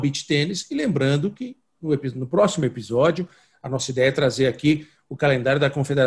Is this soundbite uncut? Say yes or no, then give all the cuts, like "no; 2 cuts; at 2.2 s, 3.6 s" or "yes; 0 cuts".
yes; 0 cuts